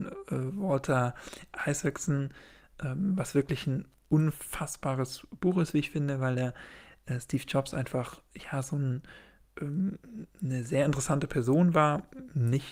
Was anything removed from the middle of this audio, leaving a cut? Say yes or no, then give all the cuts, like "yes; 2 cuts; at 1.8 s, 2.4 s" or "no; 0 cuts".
no; 0 cuts